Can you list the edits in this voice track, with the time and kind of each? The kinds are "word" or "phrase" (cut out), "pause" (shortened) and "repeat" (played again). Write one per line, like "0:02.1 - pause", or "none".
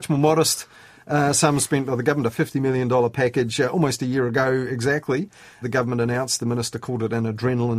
0:05.6 - word

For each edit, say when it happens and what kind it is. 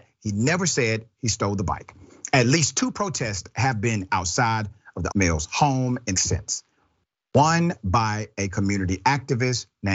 0:04.1 - word
0:05.1 - word
0:06.2 - word

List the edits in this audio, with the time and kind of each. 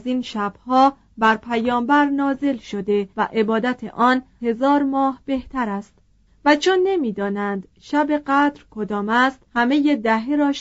0:03.1 - pause
0:04.4 - word
0:06.3 - pause
0:09.5 - pause

